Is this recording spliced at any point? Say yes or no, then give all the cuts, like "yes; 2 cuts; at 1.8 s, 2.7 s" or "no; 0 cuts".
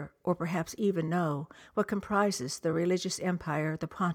no; 0 cuts